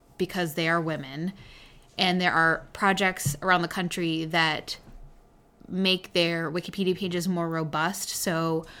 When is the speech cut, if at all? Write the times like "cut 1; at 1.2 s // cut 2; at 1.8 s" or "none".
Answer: none